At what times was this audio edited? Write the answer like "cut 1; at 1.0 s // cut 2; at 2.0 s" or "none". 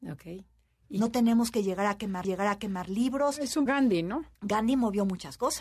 cut 1; at 2.2 s // cut 2; at 3.7 s // cut 3; at 4.3 s